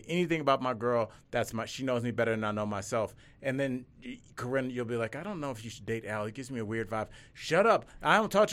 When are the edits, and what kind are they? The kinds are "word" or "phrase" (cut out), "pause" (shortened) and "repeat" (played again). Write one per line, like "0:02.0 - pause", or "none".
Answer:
none